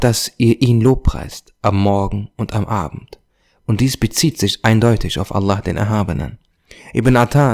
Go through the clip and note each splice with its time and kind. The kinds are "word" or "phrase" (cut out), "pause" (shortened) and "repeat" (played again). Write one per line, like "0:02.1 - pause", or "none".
none

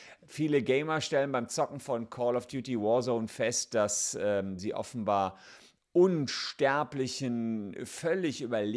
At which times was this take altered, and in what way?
none

